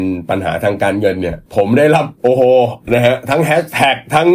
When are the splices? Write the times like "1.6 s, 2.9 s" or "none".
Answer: 1.5 s, 2.2 s